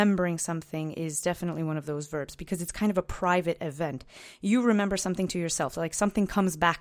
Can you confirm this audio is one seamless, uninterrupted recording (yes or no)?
yes